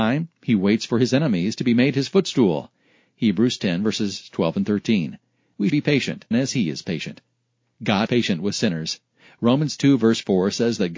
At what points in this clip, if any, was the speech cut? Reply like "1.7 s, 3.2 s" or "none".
5.7 s, 6.3 s, 8.1 s